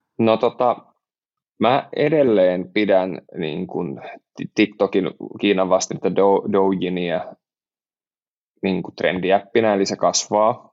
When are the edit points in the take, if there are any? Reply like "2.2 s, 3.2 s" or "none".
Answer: 3.3 s